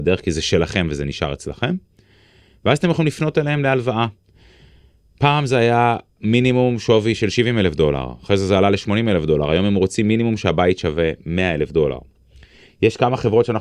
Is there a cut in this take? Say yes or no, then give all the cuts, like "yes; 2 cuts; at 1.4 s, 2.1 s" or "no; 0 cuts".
no; 0 cuts